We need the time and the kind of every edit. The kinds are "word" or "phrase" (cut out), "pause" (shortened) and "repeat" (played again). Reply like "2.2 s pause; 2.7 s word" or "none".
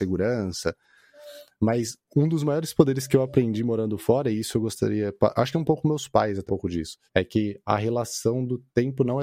2.0 s pause; 5.5 s phrase; 6.5 s word; 7.1 s pause